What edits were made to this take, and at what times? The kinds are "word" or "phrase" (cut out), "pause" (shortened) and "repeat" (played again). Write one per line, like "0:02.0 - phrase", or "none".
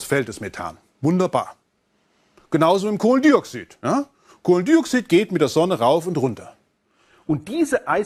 none